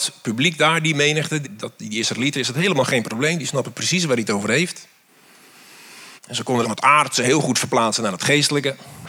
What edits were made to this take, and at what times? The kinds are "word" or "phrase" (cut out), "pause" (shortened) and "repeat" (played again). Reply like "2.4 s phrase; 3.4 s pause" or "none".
1.4 s word; 6.2 s pause; 6.6 s phrase